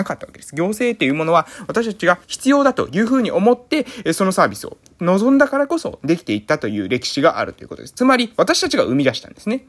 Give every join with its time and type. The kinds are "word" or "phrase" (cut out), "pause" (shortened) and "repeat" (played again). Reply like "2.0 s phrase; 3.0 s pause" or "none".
2.2 s pause